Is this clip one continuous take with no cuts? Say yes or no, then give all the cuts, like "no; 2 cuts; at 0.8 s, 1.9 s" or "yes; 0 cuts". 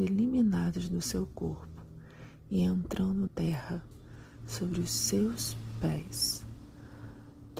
no; 1 cut; at 3.3 s